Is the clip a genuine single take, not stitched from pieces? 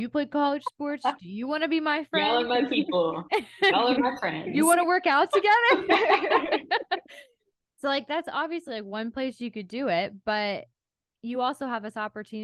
yes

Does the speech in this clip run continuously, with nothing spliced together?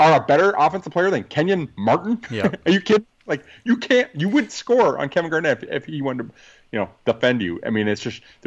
yes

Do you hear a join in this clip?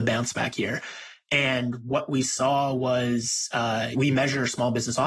yes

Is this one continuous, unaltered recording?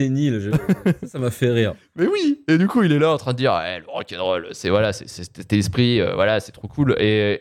yes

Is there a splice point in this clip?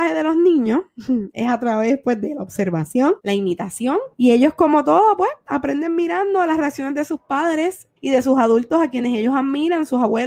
yes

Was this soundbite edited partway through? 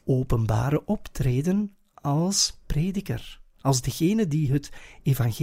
no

